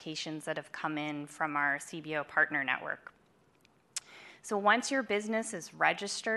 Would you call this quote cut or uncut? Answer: uncut